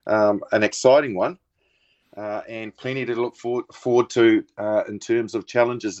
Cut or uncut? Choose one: uncut